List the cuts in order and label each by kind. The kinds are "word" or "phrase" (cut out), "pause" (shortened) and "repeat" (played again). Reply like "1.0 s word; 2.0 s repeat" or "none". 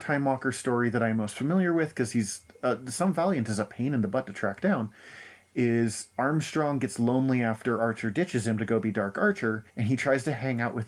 9.7 s pause